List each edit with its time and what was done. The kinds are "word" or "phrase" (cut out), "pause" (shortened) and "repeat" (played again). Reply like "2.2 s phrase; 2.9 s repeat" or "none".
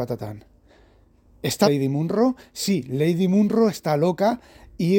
1.6 s word